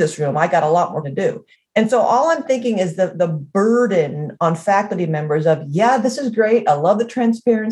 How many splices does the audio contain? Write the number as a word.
two